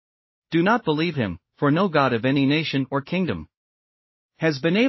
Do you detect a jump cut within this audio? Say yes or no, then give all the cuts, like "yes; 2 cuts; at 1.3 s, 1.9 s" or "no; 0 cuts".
no; 0 cuts